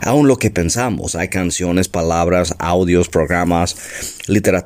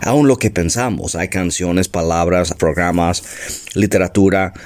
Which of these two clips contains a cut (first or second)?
second